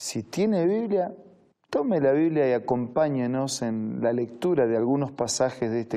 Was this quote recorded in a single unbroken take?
yes; 0 cuts

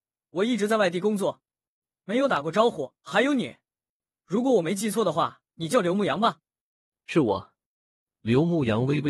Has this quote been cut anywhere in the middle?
yes; 2 cuts; at 3.0 s, 5.5 s

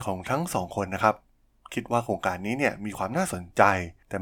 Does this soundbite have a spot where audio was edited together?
no; 0 cuts

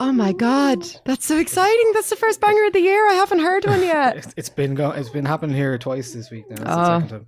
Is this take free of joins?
yes; 0 cuts

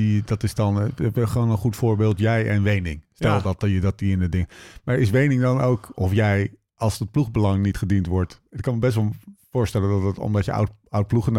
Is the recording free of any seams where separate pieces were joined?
yes; 0 cuts

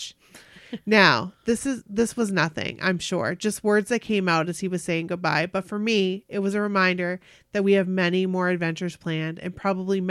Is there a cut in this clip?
no; 0 cuts

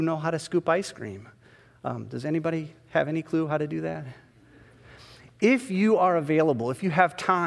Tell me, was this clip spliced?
no; 0 cuts

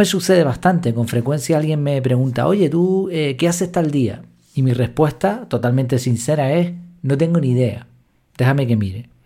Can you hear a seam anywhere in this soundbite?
no; 0 cuts

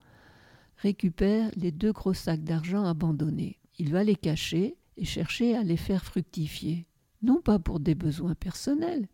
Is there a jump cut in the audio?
yes; 3 cuts; at 3.7 s, 4.8 s, 7.0 s

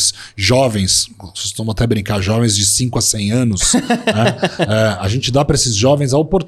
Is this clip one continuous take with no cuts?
yes; 0 cuts

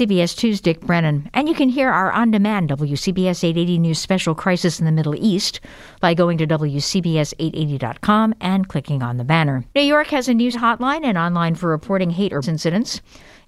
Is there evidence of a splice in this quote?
yes; 4 cuts; at 9.7 s, 10.5 s, 11.6 s, 12.4 s

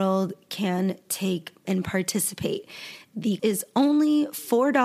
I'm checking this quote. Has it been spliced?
yes; 2 cuts; at 1.6 s, 3.4 s

